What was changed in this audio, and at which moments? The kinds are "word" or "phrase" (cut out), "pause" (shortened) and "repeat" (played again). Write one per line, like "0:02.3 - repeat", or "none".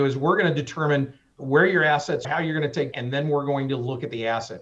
0:02.2 - word
0:02.9 - word